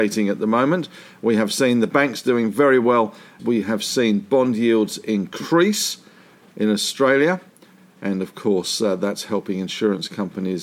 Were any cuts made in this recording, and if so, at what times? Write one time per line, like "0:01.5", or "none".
0:03.4